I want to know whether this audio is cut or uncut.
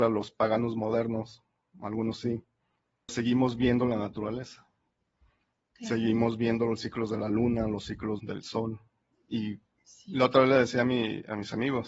cut